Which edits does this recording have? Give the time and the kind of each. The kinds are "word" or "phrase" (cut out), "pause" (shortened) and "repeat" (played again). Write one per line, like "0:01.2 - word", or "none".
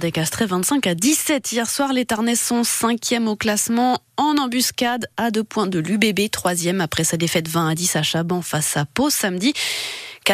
none